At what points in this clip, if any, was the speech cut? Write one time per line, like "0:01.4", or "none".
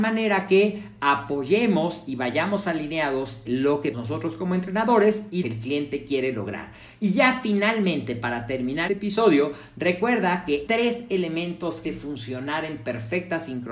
0:03.4
0:03.9
0:05.4
0:08.9
0:10.7
0:11.8